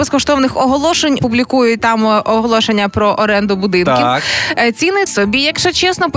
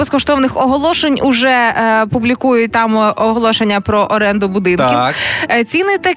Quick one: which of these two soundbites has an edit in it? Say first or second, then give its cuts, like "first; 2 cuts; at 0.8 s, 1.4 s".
first; 2 cuts; at 1.2 s, 5.1 s